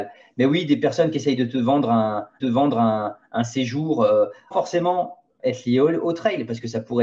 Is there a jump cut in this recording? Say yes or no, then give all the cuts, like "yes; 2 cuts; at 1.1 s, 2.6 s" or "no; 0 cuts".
yes; 2 cuts; at 2.4 s, 4.5 s